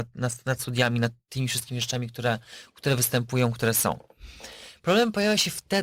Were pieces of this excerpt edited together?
no; 0 cuts

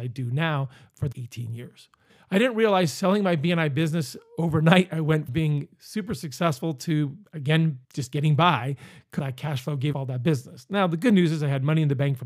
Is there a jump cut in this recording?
yes; 6 cuts; at 1.1 s, 2.1 s, 5.3 s, 7.8 s, 9.2 s, 9.9 s

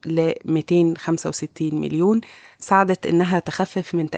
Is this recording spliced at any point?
no; 0 cuts

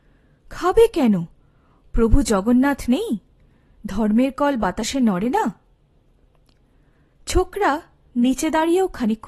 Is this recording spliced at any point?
no; 0 cuts

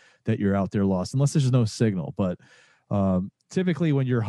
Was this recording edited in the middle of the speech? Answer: no; 0 cuts

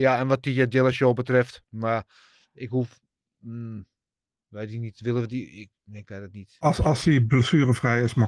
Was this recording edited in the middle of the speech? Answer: no; 0 cuts

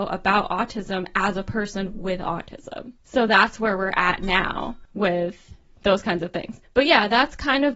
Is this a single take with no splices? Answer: yes; 0 cuts

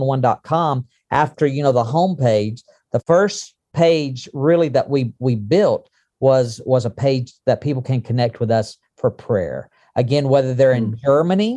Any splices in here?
no; 0 cuts

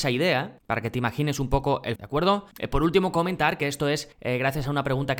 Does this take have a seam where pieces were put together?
yes; 2 cuts; at 2.0 s, 4.1 s

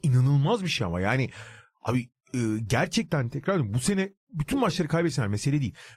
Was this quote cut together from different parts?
no; 0 cuts

